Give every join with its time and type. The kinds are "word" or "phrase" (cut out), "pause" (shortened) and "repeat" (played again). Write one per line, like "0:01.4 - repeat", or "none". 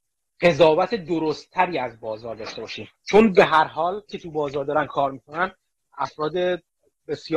0:02.9 - pause
0:04.1 - word

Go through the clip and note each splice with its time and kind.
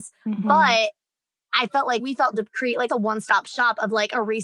0:02.0 - word
0:02.3 - word
0:02.9 - word

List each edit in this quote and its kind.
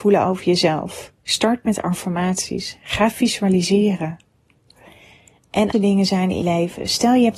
0:01.2 - pause
0:05.7 - word
0:06.4 - word

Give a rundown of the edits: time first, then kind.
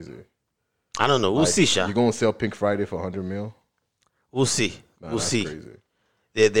none

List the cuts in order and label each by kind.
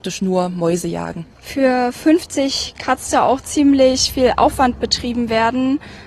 0:01.3 - pause
0:03.1 - word

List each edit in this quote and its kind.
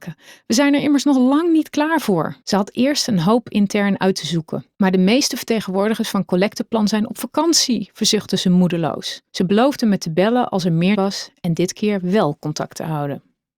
0:02.4 - pause
0:04.7 - pause
0:09.3 - pause
0:10.9 - word

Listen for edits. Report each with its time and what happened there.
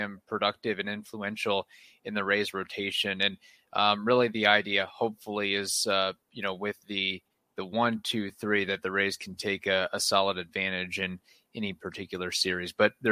none

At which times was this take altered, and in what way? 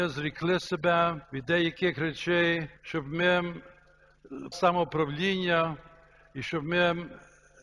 0:01.2 - pause
0:02.8 - pause
0:04.5 - word

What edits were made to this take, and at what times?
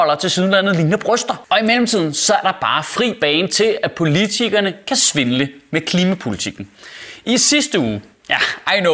0:02.4 - word

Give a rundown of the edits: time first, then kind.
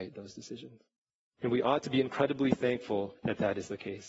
0:01.1 - pause
0:03.2 - pause

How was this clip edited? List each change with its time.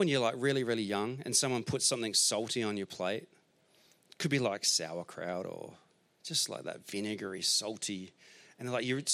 0:06.1 - pause

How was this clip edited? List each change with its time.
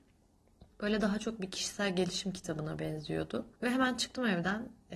0:03.6 - pause

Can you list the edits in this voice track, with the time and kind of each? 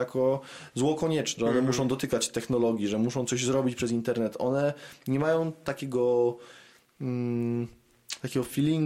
0:01.4 - word

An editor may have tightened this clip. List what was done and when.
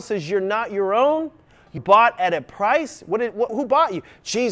0:01.8 - word
0:03.5 - word

